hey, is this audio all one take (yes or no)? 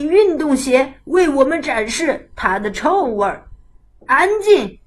yes